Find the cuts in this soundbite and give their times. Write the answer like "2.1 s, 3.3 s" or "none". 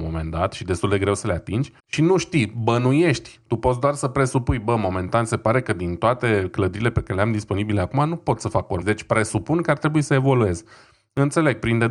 1.8 s, 8.8 s